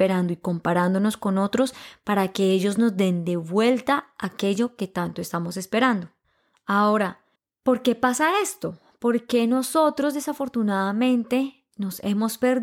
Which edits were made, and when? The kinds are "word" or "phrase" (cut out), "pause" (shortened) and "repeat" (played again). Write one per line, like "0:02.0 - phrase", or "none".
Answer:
0:07.4 - pause